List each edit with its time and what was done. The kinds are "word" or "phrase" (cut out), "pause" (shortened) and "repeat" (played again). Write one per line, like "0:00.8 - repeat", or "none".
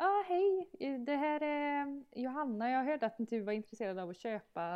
none

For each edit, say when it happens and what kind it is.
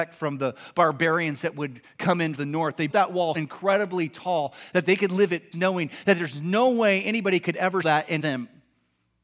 0:02.3 - word
0:02.9 - word
0:03.3 - word
0:05.5 - word
0:07.8 - word
0:08.2 - word

